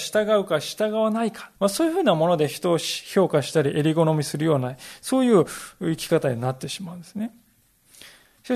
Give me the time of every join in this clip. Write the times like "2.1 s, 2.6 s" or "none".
1.6 s